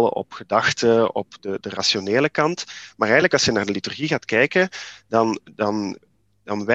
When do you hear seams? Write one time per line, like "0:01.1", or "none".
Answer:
none